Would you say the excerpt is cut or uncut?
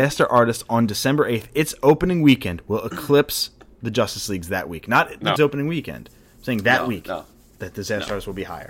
cut